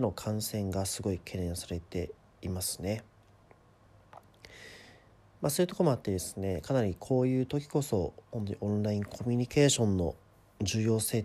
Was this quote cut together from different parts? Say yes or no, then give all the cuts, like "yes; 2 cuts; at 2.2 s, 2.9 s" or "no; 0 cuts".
no; 0 cuts